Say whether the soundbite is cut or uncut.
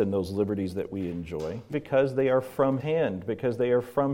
cut